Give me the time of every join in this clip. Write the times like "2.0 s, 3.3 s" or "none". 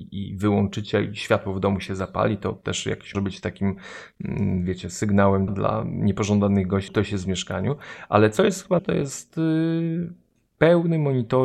3.1 s, 5.5 s, 6.9 s, 8.8 s